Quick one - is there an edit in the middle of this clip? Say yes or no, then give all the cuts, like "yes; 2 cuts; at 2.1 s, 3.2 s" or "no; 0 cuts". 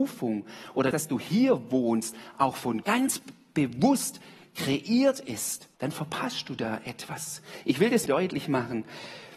yes; 4 cuts; at 0.9 s, 2.8 s, 5.7 s, 8.1 s